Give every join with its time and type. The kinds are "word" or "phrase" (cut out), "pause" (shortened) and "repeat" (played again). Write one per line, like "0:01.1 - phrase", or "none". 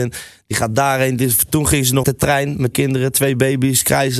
0:02.0 - word
0:02.7 - word